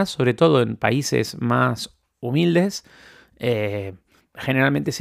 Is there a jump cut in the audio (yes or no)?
no